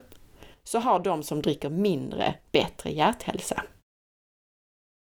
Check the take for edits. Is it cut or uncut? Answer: uncut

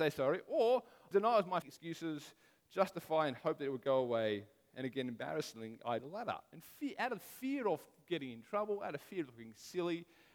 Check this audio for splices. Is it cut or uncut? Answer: cut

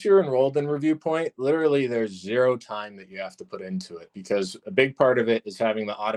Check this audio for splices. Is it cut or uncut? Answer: uncut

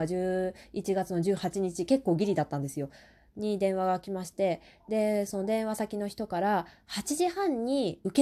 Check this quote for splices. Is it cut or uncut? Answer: uncut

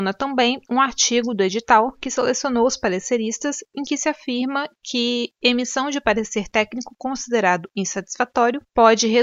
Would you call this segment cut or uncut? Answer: uncut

